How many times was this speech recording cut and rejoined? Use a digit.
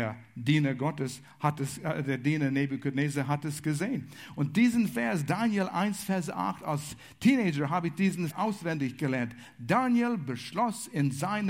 1